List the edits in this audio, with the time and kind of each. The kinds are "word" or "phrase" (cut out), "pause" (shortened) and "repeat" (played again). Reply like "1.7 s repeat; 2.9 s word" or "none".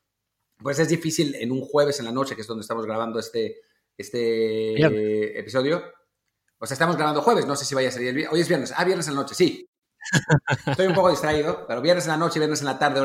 none